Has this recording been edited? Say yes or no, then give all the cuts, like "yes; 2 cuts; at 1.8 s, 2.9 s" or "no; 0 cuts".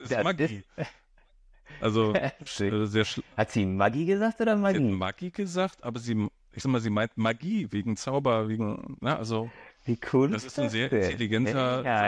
yes; 2 cuts; at 2.5 s, 6.6 s